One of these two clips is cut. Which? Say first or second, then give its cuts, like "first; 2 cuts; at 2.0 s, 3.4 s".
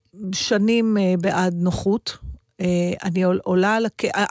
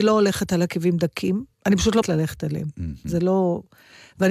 second; 2 cuts; at 1.5 s, 2.0 s